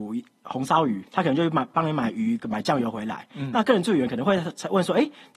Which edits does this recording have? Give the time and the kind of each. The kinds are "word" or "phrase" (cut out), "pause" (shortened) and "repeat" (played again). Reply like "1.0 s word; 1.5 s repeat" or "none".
1.1 s pause